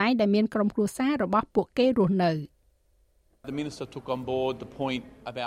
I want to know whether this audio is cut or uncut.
uncut